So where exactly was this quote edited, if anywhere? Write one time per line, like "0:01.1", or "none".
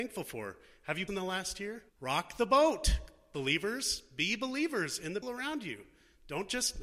0:01.1
0:01.9
0:05.2